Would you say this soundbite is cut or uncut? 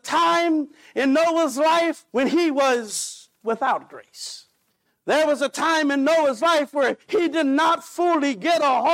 cut